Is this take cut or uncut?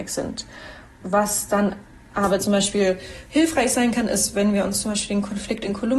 uncut